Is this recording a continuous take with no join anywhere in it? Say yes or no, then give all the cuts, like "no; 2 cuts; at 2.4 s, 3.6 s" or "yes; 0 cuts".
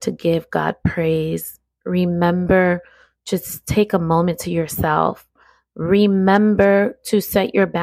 yes; 0 cuts